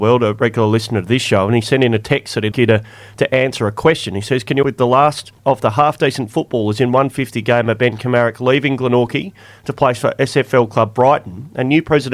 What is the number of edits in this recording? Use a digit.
3